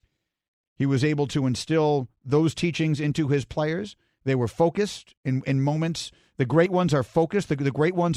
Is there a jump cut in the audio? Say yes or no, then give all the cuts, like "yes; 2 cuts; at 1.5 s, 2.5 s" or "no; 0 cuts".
no; 0 cuts